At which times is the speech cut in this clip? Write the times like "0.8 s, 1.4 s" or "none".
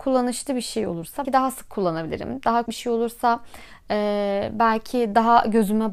1.2 s, 2.7 s